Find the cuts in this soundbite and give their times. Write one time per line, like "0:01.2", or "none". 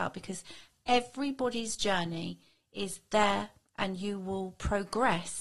0:03.7